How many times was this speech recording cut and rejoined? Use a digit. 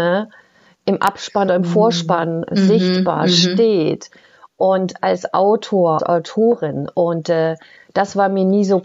2